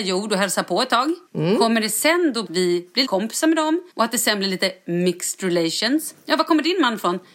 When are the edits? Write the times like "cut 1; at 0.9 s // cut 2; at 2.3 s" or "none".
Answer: cut 1; at 1.3 s // cut 2; at 2.5 s // cut 3; at 3.1 s // cut 4; at 3.9 s